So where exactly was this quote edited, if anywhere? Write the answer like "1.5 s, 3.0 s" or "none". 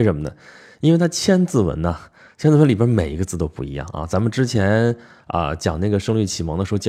none